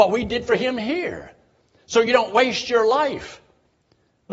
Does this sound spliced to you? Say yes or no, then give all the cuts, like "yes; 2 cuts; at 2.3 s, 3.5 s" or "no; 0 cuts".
no; 0 cuts